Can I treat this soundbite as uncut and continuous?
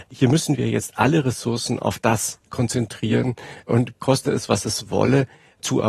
no; 1 cut; at 4.0 s

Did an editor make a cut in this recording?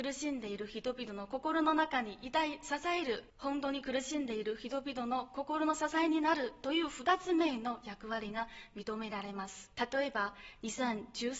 yes; 2 cuts; at 3.3 s, 9.7 s

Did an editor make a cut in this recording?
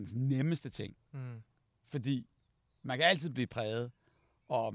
no; 0 cuts

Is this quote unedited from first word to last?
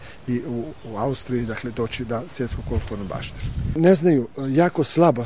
yes; 0 cuts

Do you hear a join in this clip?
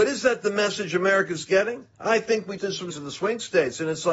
yes; 3 cuts; at 1.9 s, 2.6 s, 2.9 s

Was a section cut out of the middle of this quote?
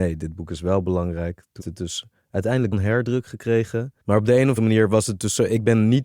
yes; 4 cuts; at 1.6 s, 2.7 s, 4.0 s, 4.6 s

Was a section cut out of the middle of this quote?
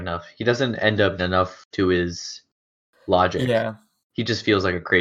yes; 2 cuts; at 1.2 s, 1.7 s

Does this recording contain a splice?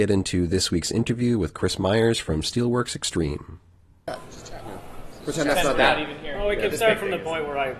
no; 0 cuts

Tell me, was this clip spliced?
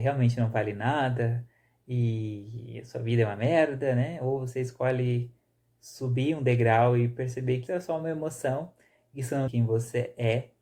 yes; 2 cuts; at 7.7 s, 9.5 s

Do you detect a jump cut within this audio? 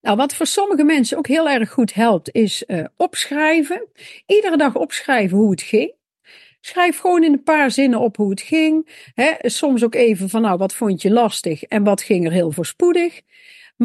no; 0 cuts

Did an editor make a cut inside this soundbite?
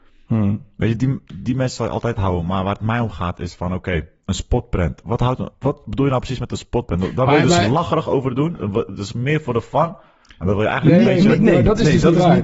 no; 0 cuts

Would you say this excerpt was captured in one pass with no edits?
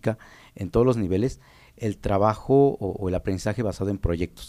yes; 0 cuts

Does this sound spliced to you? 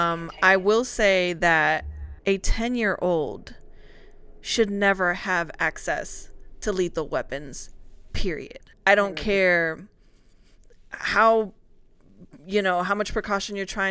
yes; 2 cuts; at 2.2 s, 8.7 s

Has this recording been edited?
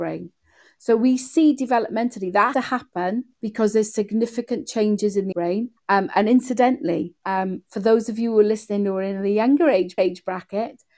yes; 6 cuts; at 2.5 s, 3.3 s, 5.3 s, 5.8 s, 7.2 s, 10.0 s

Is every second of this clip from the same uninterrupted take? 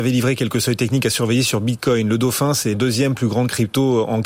no; 1 cut; at 2.7 s

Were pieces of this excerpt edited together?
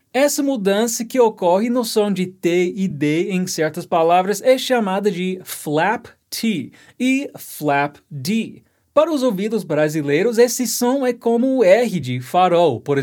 no; 0 cuts

